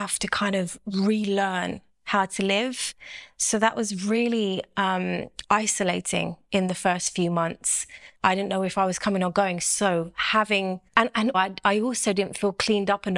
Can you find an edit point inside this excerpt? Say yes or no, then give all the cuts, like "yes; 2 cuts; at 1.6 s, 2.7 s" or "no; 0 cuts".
yes; 3 cuts; at 8.1 s, 10.9 s, 11.3 s